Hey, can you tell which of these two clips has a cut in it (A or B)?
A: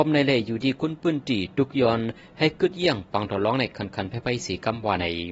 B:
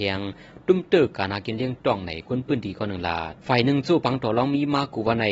B